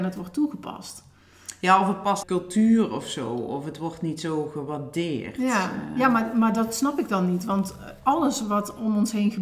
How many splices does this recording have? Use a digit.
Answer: 1